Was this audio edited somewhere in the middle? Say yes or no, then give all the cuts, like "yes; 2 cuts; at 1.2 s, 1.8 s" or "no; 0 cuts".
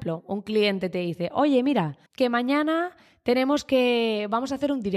yes; 1 cut; at 2.1 s